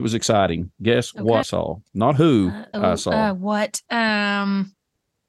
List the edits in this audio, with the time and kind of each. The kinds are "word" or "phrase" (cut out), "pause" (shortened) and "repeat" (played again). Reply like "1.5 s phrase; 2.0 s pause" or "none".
1.4 s word; 2.7 s word